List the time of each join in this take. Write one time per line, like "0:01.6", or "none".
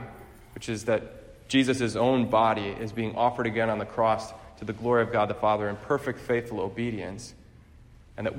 none